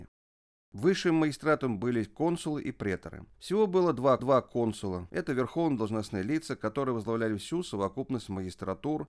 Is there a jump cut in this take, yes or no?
yes